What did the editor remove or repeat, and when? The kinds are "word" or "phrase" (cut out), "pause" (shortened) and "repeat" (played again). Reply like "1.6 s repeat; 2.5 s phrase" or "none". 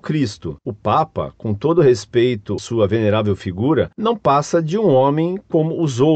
2.6 s word